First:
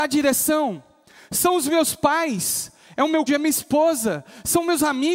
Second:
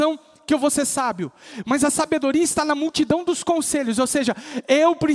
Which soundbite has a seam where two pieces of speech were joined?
first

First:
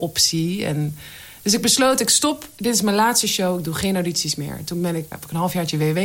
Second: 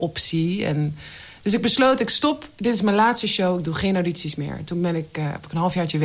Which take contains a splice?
first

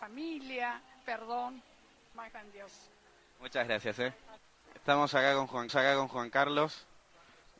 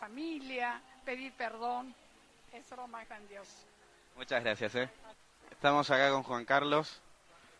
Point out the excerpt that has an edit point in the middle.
first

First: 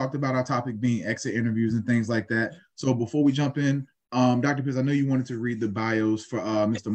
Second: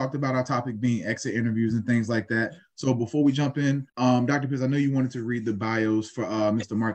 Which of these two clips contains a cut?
second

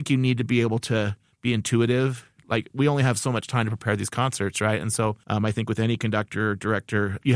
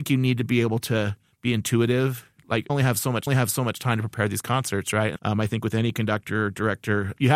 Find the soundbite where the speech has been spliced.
second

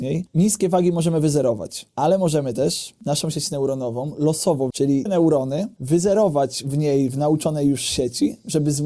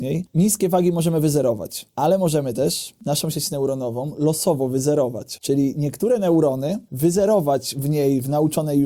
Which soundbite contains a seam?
first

